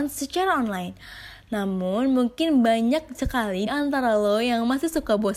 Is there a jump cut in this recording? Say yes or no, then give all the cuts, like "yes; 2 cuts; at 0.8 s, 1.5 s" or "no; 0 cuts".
yes; 1 cut; at 3.7 s